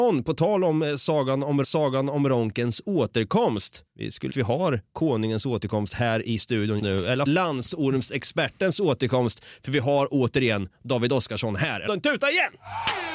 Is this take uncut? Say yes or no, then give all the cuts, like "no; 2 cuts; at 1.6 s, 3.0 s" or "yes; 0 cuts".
no; 6 cuts; at 1.6 s, 3.9 s, 4.3 s, 6.8 s, 7.3 s, 11.9 s